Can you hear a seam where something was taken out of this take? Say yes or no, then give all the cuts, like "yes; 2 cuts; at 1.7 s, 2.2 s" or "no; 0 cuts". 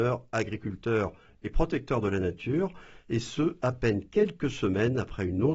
no; 0 cuts